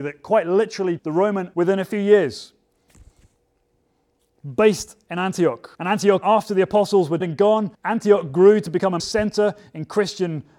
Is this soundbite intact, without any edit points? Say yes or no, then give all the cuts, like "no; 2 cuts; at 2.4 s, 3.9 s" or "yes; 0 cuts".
no; 7 cuts; at 1.0 s, 1.5 s, 5.7 s, 6.2 s, 7.2 s, 7.7 s, 9.0 s